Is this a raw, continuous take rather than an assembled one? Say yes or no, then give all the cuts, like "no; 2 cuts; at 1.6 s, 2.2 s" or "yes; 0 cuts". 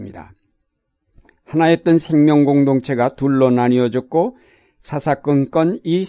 yes; 0 cuts